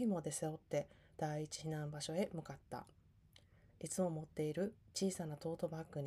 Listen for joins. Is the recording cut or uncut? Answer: uncut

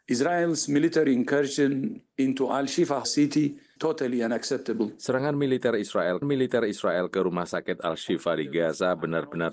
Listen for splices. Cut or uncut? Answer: cut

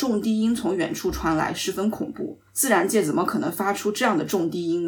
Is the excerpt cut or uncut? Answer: cut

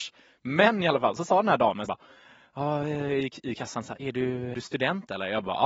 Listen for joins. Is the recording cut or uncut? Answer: cut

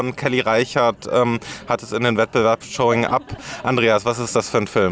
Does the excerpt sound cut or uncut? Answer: cut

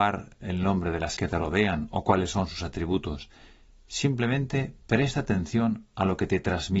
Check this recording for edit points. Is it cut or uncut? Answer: cut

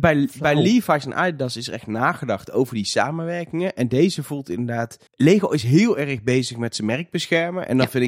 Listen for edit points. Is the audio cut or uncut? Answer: cut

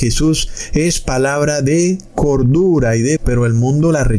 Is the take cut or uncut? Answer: cut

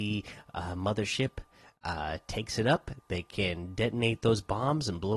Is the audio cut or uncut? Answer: uncut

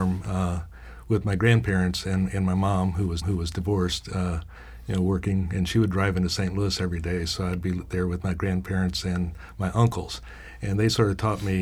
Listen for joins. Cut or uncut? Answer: cut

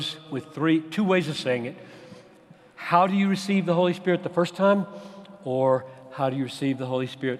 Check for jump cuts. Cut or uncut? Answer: uncut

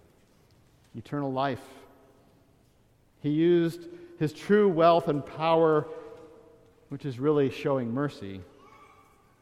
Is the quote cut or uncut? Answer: uncut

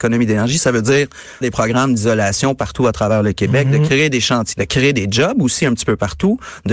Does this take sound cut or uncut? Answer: cut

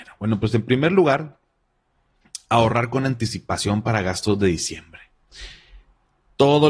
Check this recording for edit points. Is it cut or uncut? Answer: uncut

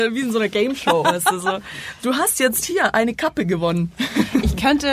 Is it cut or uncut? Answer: uncut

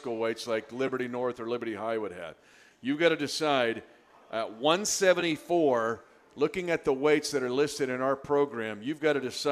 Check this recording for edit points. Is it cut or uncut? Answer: uncut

